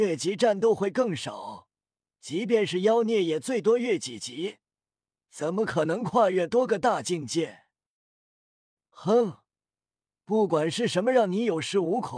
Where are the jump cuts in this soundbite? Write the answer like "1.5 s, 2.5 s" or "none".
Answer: none

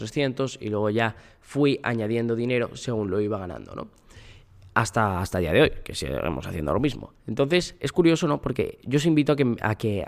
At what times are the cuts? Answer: none

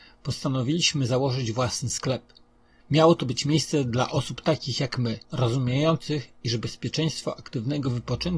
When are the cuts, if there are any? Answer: 5.2 s

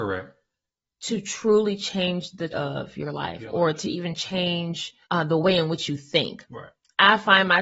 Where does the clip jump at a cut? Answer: 2.5 s, 5.0 s

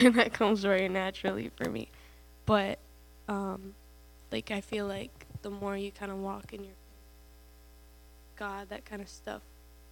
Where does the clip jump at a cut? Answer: none

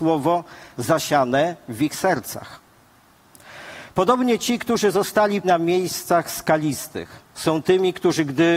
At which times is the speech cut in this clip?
5.4 s

